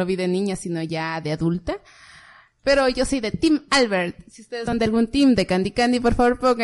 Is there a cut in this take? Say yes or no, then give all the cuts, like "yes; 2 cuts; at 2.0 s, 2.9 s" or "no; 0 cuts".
no; 0 cuts